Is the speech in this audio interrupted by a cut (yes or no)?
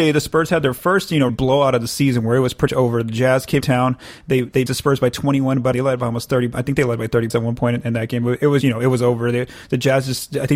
yes